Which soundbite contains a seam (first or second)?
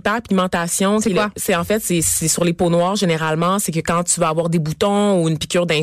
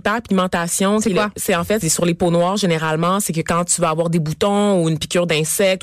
second